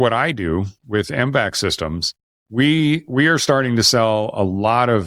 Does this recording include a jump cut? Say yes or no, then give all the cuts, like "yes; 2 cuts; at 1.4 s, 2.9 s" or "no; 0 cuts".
no; 0 cuts